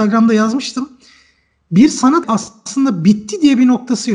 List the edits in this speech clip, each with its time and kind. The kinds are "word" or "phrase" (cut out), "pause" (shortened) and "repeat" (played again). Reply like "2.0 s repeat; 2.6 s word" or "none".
2.2 s word